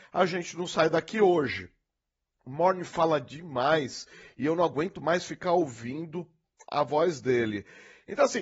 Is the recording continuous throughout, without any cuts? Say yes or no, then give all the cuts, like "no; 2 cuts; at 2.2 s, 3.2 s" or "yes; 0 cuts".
yes; 0 cuts